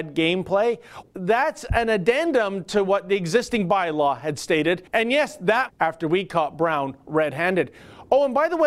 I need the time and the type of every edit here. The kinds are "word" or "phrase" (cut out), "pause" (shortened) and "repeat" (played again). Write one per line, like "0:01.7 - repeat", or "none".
0:01.0 - word
0:04.9 - pause
0:05.7 - phrase